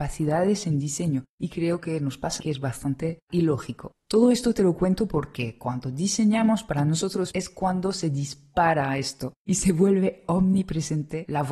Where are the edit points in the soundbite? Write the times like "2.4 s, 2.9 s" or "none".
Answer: 1.3 s, 2.4 s, 3.3 s, 4.0 s, 7.3 s, 9.4 s

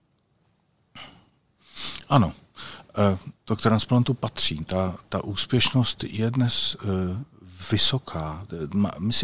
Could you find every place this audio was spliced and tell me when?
none

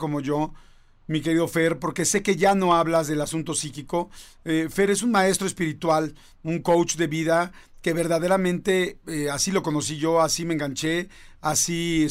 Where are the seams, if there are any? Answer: none

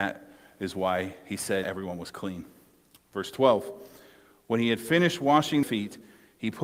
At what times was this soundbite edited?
1.6 s, 5.6 s

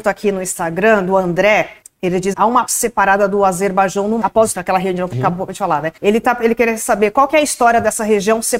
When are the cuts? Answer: 1.8 s, 2.3 s, 2.7 s, 4.2 s, 4.5 s, 5.1 s, 6.0 s

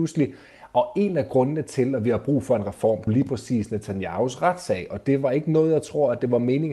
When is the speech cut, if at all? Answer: 3.1 s

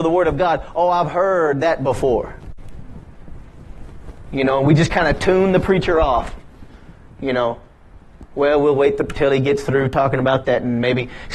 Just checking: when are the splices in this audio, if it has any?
none

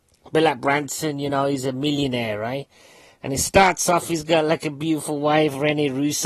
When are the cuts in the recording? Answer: none

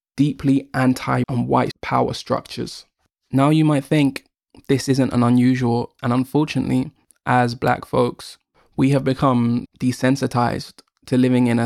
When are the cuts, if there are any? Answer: 1.2 s, 1.7 s, 6.0 s, 9.7 s

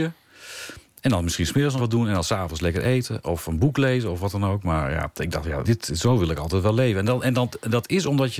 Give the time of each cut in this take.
1.8 s, 5.6 s

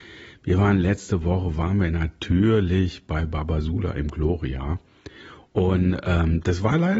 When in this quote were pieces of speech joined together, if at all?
none

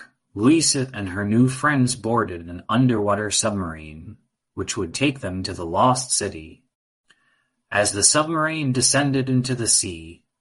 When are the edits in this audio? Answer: none

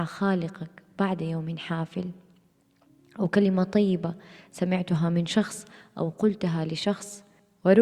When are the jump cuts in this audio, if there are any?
none

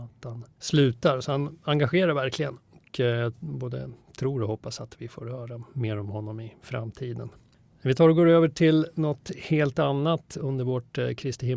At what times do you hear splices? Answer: none

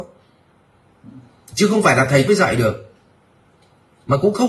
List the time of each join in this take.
2.3 s

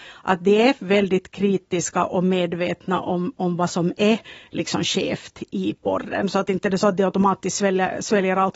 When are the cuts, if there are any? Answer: none

